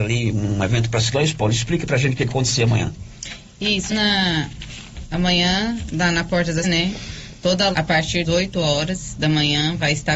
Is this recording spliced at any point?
yes; 6 cuts; at 1.1 s, 2.3 s, 3.9 s, 6.6 s, 7.7 s, 8.2 s

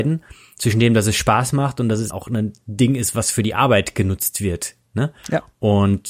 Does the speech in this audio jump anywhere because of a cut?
yes; 2 cuts; at 2.1 s, 4.8 s

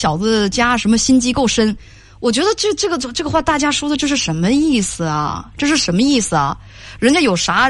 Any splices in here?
no; 0 cuts

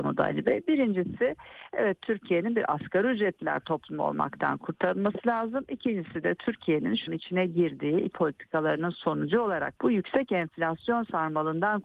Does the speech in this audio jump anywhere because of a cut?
yes; 3 cuts; at 7.1 s, 8.1 s, 9.8 s

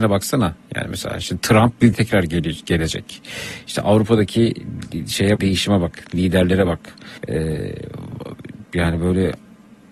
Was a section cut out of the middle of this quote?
yes; 3 cuts; at 1.9 s, 5.4 s, 7.2 s

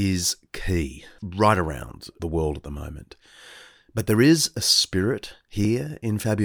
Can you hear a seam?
no; 0 cuts

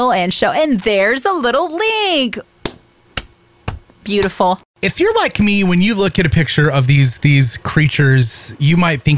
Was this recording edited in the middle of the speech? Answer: no; 0 cuts

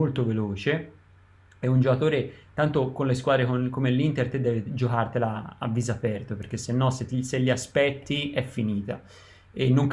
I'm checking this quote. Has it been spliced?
no; 0 cuts

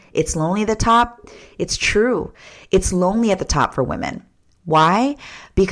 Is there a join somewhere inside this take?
no; 0 cuts

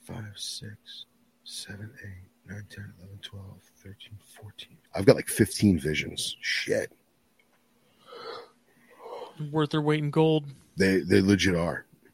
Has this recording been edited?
yes; 2 cuts; at 2.3 s, 4.9 s

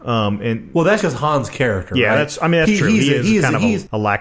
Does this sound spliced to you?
yes; 1 cut; at 1.0 s

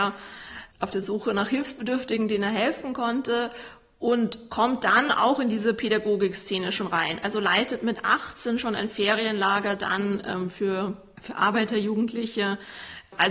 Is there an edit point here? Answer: no; 0 cuts

